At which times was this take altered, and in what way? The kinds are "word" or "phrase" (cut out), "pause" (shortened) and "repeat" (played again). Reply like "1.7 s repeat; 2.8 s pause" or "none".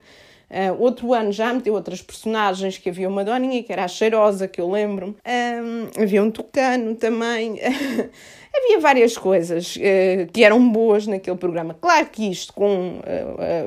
5.2 s pause